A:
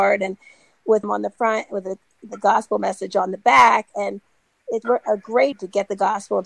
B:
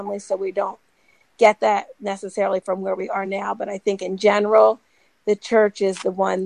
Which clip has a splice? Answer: A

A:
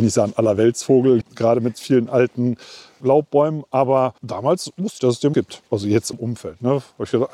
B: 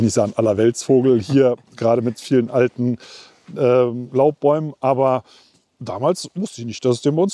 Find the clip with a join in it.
A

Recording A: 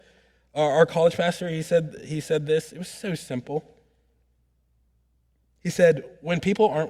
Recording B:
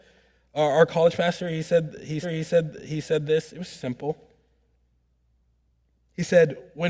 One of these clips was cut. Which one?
B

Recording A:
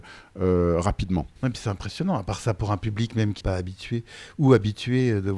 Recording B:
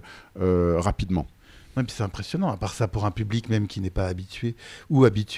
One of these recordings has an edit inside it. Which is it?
A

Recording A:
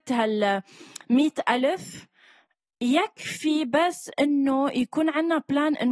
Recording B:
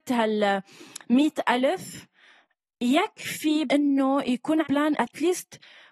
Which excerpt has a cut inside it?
B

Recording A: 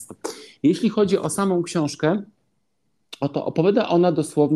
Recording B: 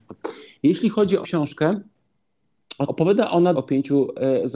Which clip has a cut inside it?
B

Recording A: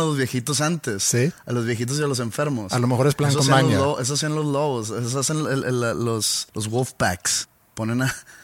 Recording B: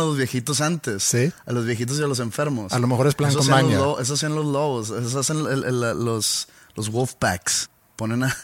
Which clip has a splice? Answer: A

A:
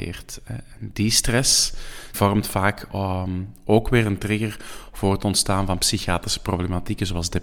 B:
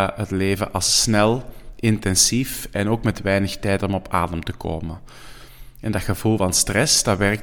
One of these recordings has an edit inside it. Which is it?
A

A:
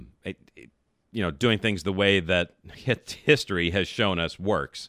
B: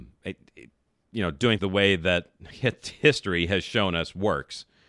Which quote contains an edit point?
B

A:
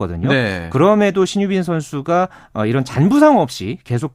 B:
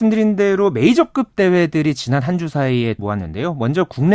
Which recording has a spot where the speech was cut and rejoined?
B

